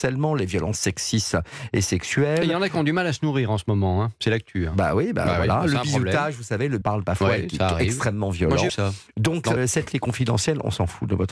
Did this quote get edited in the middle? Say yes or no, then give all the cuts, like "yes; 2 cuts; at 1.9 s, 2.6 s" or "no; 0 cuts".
yes; 4 cuts; at 6.8 s, 8.7 s, 9.6 s, 9.9 s